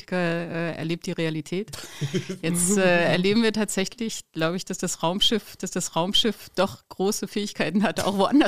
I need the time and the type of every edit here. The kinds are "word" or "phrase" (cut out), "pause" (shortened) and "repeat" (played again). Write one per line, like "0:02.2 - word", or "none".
0:05.6 - repeat